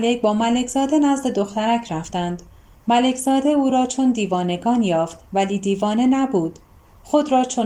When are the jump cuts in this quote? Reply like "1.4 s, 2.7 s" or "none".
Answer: none